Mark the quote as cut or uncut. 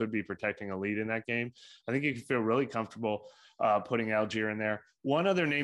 uncut